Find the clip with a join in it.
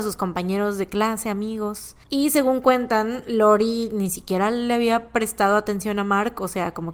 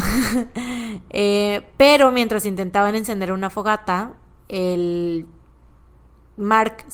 first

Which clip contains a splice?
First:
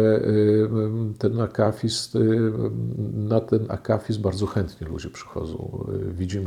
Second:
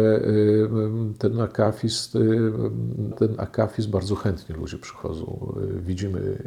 second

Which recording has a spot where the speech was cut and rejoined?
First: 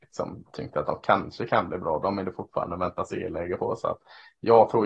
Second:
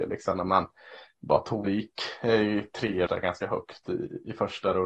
second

